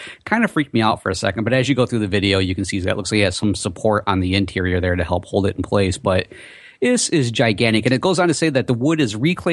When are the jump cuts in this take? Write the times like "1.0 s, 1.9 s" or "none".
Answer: none